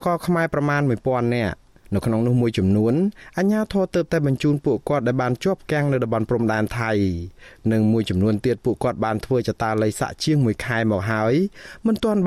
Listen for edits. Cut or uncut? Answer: uncut